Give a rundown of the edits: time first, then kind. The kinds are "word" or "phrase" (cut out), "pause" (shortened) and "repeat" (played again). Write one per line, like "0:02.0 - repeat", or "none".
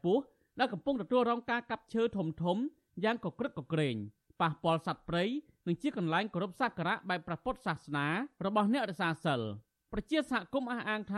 none